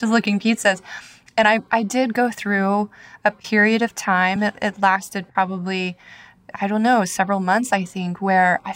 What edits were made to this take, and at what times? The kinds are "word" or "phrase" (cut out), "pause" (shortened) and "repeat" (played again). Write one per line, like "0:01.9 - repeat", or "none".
none